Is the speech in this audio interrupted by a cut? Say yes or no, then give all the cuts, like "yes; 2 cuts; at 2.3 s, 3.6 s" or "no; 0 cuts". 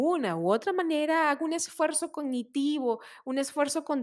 no; 0 cuts